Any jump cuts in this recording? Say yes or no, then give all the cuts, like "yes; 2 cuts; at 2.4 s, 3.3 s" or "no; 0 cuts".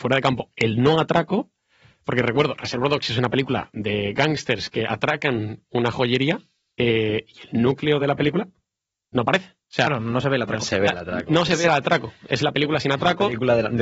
no; 0 cuts